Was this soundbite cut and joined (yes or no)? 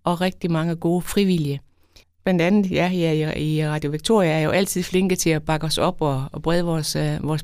no